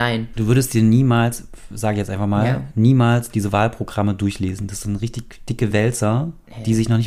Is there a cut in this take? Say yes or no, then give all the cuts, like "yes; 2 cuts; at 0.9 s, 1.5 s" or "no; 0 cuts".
no; 0 cuts